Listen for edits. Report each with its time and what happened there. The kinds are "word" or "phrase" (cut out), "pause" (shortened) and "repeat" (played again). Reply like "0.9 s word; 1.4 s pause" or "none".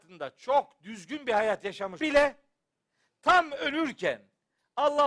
2.0 s word